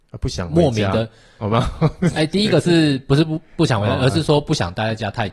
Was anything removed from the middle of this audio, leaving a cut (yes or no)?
no